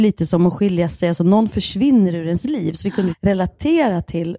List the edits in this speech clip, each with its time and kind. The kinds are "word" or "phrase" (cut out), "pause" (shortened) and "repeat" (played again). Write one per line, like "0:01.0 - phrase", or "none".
0:03.1 - word